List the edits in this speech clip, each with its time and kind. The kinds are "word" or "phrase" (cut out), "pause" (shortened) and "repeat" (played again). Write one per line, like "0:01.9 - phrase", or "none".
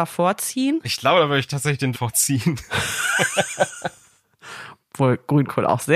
0:01.9 - word